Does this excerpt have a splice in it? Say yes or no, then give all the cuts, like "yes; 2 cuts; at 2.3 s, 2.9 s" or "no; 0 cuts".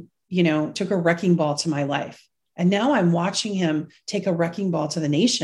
no; 0 cuts